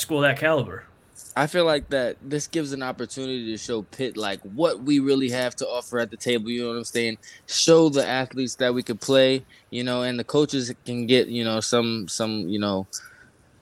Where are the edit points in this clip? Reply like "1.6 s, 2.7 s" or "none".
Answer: none